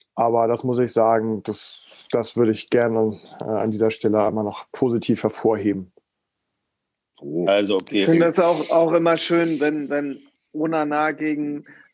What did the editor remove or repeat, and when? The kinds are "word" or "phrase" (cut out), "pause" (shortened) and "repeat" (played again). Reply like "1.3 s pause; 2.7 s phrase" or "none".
none